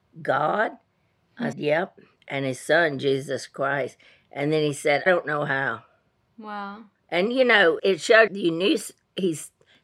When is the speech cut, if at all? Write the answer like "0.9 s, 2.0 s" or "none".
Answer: 1.5 s, 5.1 s, 7.8 s, 8.3 s

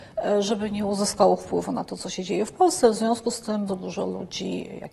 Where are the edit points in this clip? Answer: 3.7 s

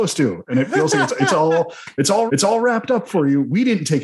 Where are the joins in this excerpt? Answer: 2.3 s

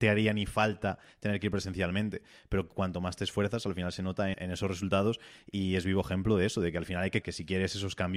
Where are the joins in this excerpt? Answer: 4.3 s, 7.2 s

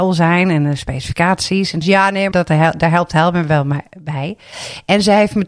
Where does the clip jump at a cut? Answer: 1.8 s, 2.3 s

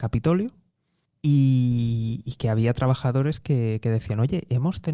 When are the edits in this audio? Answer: 1.1 s

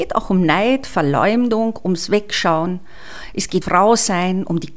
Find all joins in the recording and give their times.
3.6 s

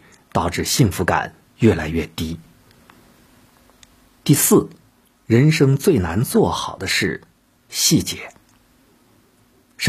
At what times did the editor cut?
none

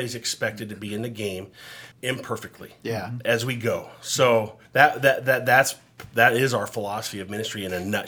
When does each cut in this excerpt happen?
1.9 s, 4.6 s

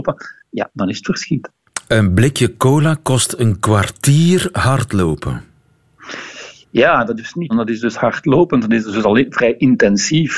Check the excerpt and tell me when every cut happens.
7.2 s, 7.5 s

